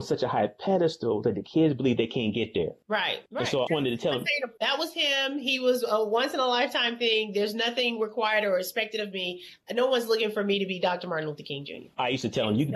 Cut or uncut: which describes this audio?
cut